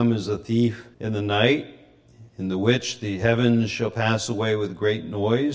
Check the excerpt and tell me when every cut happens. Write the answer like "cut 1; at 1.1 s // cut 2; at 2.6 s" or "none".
cut 1; at 0.9 s // cut 2; at 2.3 s